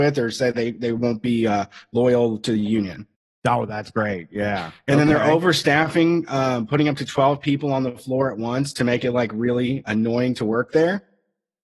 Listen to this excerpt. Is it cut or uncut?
cut